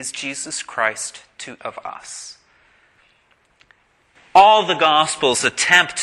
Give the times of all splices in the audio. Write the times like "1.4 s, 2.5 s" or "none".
1.6 s